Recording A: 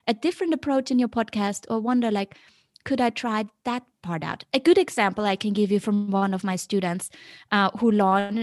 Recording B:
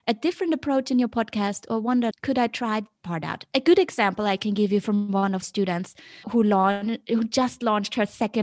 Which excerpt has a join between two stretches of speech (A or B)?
B